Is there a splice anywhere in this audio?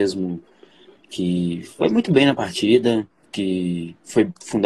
no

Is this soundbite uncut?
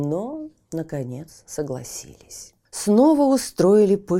no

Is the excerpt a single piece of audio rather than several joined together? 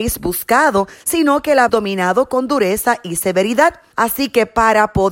no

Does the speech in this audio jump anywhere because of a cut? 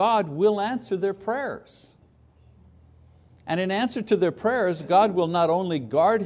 no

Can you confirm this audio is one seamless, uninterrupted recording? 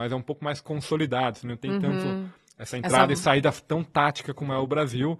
yes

